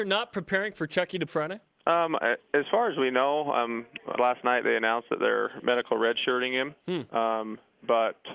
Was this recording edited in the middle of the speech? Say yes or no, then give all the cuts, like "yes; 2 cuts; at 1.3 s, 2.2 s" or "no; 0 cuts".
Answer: yes; 2 cuts; at 1.3 s, 4.2 s